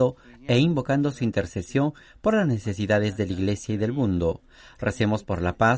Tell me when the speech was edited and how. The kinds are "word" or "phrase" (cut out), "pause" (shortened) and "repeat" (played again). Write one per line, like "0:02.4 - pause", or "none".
none